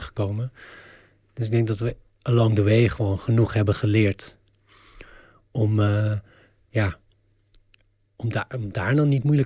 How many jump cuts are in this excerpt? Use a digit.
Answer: 0